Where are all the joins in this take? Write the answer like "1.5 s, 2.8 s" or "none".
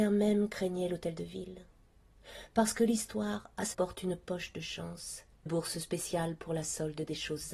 3.7 s, 5.5 s